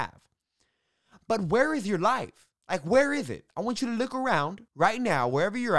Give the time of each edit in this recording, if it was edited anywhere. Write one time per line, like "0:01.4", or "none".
0:02.6
0:04.7